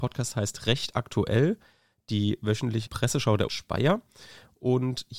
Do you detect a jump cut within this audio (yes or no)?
yes